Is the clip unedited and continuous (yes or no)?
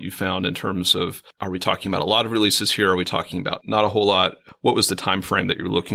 yes